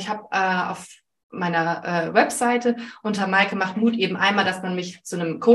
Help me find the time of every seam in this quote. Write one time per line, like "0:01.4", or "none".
none